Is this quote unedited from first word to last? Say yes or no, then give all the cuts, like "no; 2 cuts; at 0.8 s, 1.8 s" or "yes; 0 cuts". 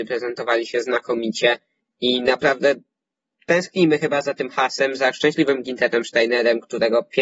yes; 0 cuts